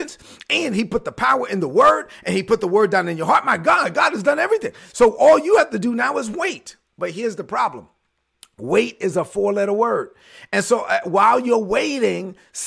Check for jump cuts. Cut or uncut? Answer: cut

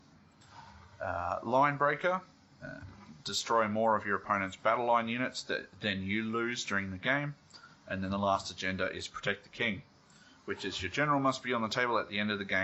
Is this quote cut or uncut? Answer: uncut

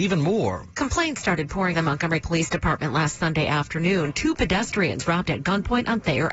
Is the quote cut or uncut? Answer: cut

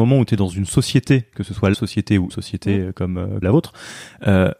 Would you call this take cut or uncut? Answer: cut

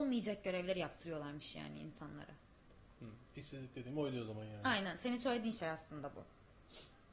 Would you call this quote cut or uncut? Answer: uncut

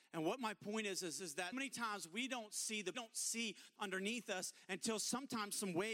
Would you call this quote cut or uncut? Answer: cut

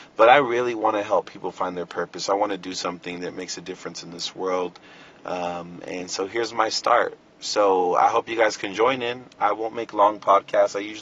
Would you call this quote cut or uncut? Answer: uncut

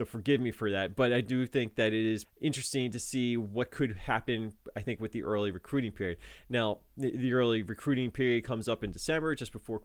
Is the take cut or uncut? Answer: cut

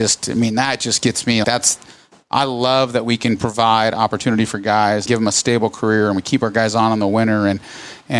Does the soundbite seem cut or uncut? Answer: cut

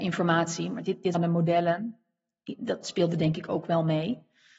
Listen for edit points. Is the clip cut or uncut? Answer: cut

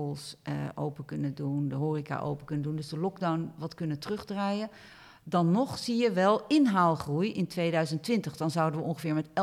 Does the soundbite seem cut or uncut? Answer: uncut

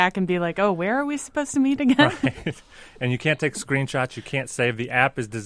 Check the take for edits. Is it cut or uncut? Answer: uncut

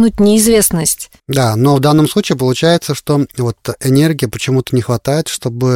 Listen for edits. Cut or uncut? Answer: cut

